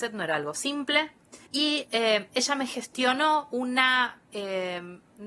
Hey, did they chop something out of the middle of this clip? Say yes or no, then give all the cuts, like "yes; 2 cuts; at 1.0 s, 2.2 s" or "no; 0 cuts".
yes; 1 cut; at 1.5 s